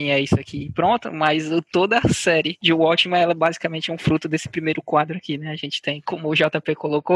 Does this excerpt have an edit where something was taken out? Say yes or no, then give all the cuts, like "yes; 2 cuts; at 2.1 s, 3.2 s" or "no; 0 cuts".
no; 0 cuts